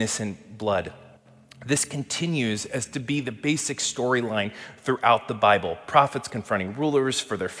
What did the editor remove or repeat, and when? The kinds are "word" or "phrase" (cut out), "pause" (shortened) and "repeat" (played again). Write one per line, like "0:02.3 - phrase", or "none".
none